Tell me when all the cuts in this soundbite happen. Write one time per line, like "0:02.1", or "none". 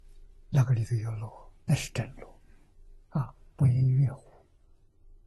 0:01.6

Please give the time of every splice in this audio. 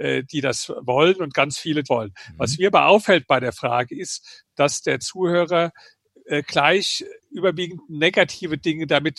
0:01.9
0:07.2

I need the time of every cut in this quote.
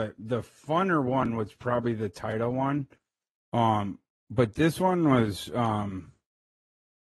none

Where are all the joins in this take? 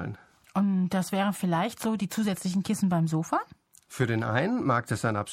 none

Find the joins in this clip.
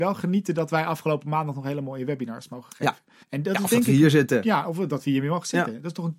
0:03.2

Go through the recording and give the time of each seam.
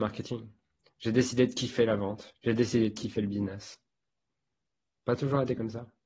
0:02.4

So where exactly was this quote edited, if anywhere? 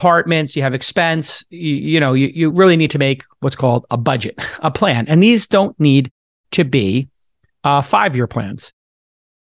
none

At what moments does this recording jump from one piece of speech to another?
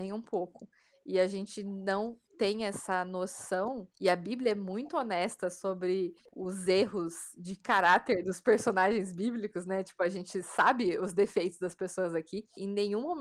none

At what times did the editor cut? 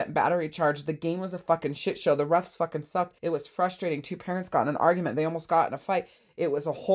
0:03.2

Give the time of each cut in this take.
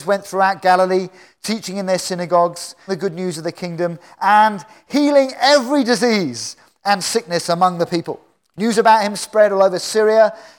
0:02.9

